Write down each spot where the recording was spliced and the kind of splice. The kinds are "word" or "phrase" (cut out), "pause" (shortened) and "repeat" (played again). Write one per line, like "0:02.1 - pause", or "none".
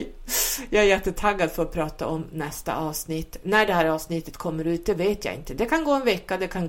none